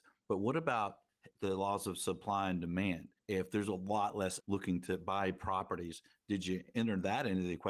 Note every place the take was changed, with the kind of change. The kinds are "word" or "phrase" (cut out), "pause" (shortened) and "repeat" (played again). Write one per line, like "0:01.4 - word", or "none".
0:01.4 - word
0:03.2 - pause
0:04.4 - word